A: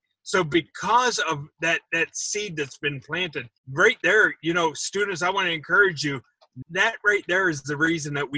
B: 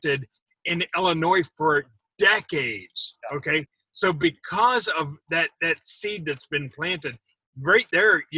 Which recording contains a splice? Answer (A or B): A